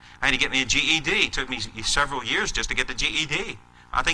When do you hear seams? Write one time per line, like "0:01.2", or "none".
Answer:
none